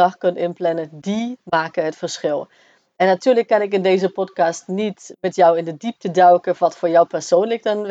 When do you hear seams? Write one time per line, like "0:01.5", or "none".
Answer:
none